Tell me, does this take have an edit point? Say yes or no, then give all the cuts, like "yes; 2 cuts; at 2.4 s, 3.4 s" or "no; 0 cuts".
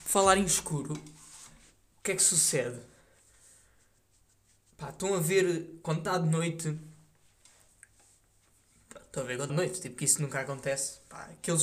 yes; 1 cut; at 9.5 s